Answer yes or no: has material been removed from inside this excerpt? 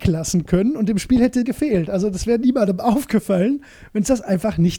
yes